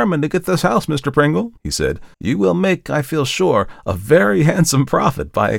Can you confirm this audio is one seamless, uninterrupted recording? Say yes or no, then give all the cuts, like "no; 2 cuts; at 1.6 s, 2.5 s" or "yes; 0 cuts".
no; 2 cuts; at 1.6 s, 2.1 s